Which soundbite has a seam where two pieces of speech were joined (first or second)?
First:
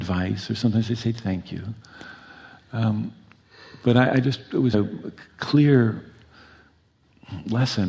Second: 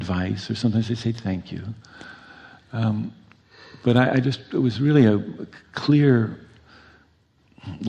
first